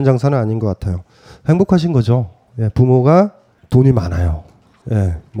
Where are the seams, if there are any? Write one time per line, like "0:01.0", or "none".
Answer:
none